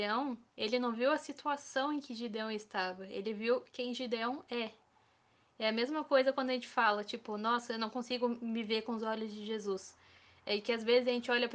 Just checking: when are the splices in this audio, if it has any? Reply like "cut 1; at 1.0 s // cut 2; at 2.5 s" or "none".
none